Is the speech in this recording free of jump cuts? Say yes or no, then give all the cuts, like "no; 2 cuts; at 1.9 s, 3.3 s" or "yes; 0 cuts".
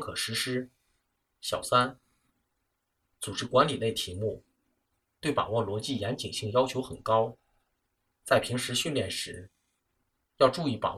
yes; 0 cuts